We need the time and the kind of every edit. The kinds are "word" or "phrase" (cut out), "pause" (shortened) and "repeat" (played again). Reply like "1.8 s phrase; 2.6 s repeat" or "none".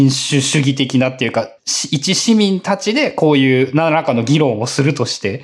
1.6 s pause